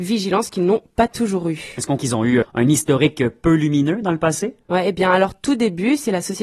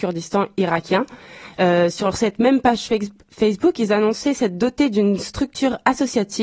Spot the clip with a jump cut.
first; 2 cuts; at 2.0 s, 2.4 s

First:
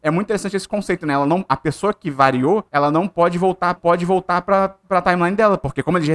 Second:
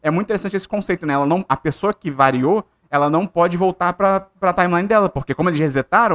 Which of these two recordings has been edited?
first; 2 cuts; at 2.7 s, 3.8 s

